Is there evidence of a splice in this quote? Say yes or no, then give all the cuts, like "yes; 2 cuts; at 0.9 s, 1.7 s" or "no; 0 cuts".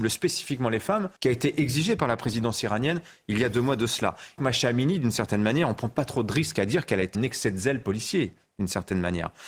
yes; 3 cuts; at 1.2 s, 4.4 s, 7.1 s